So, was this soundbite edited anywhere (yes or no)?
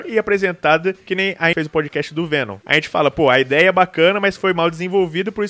yes